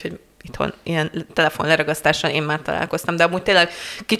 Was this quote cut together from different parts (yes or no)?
no